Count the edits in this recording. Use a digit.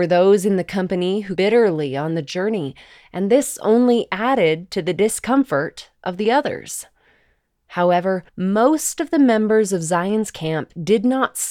2